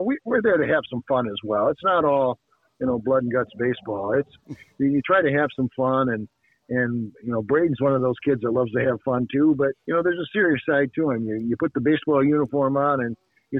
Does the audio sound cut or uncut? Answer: uncut